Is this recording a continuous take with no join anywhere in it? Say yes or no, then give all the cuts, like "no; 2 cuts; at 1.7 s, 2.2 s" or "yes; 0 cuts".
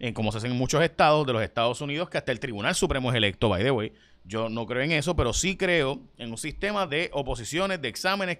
yes; 0 cuts